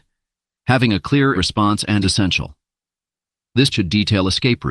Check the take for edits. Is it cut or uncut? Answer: cut